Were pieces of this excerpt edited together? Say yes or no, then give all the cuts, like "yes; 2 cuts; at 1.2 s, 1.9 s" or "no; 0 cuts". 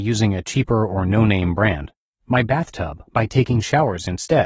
no; 0 cuts